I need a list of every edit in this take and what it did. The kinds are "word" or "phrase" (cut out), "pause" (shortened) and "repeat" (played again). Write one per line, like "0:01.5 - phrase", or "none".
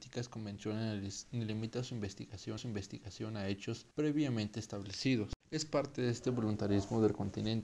0:02.6 - repeat
0:03.9 - pause
0:05.4 - pause

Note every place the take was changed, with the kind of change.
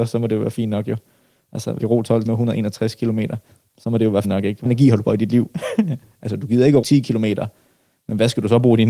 0:01.8 - word
0:02.3 - word
0:04.2 - word
0:04.7 - word
0:05.0 - word
0:06.8 - word

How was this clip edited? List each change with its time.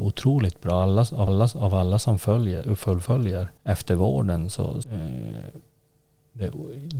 0:01.3 - repeat
0:03.6 - pause
0:04.8 - word

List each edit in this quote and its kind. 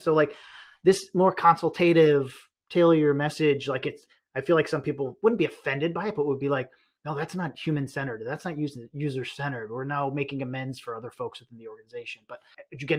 none

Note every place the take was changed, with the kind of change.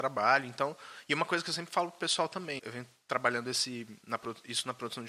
0:02.6 - word

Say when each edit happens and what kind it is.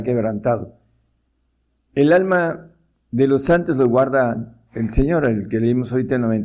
none

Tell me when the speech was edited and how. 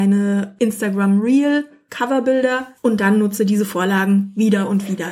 0:02.8 - pause

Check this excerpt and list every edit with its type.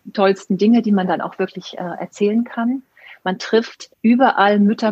0:03.9 - pause

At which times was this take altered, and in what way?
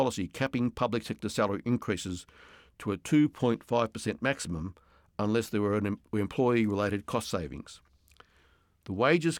none

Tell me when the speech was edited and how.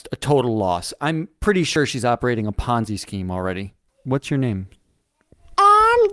0:03.9 - pause

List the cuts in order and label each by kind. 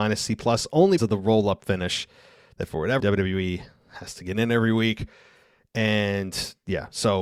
0:01.0 - word
0:03.0 - word

